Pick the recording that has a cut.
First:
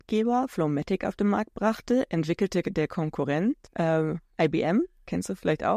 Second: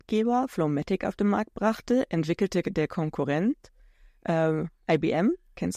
first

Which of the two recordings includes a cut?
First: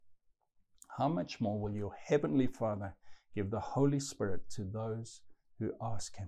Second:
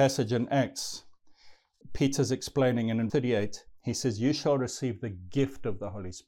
second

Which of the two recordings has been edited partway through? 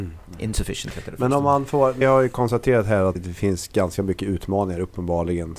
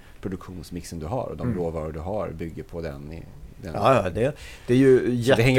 first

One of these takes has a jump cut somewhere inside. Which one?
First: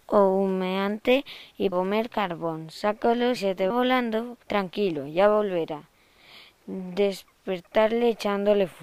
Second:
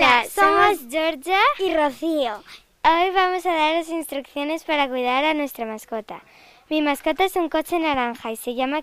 first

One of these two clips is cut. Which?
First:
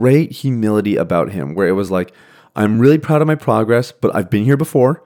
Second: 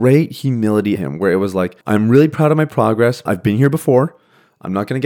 second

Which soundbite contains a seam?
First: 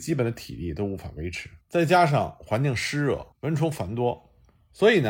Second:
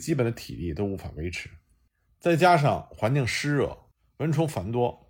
first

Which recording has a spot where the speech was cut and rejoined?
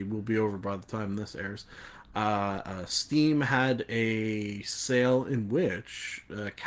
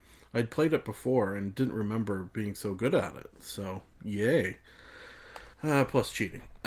second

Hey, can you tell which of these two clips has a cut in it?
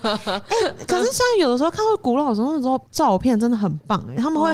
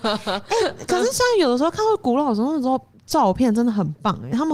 first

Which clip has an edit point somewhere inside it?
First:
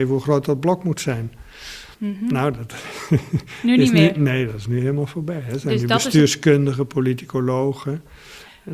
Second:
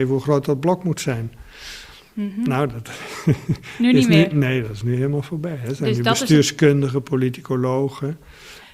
first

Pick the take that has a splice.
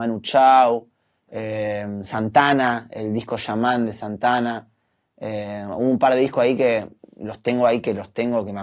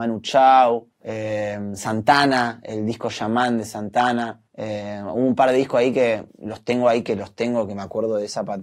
second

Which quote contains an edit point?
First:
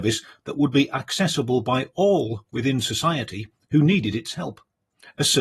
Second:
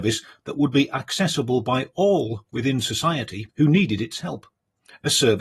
second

